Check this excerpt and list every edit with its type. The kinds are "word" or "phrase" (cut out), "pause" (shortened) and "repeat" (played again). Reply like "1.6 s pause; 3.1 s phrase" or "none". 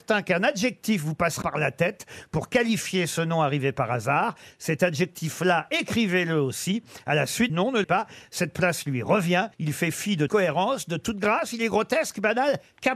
1.4 s word; 7.5 s word; 7.8 s word; 9.5 s pause; 10.3 s word